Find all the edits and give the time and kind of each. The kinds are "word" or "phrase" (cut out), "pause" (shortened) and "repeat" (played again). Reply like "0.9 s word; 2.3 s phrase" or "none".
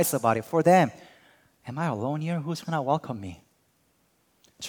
none